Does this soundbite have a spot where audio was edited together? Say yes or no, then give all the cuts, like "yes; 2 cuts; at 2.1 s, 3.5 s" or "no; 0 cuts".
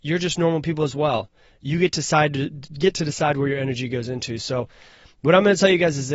no; 0 cuts